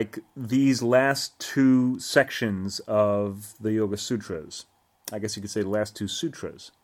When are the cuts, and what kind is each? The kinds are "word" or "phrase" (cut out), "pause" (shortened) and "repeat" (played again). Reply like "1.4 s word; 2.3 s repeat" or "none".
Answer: none